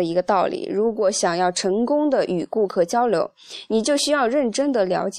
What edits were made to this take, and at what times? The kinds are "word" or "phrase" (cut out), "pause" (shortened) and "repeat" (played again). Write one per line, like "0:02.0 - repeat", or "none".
none